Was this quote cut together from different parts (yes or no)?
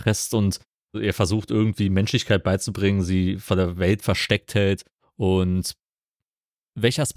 no